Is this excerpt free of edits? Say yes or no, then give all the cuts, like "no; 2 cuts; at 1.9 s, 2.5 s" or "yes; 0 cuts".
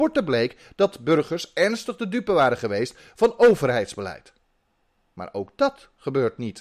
yes; 0 cuts